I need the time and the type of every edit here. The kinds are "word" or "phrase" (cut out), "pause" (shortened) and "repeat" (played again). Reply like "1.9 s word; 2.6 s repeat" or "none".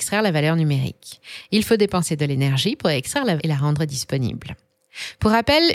3.4 s word